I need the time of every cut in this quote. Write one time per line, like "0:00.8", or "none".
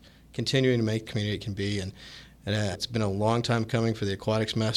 0:01.0
0:02.7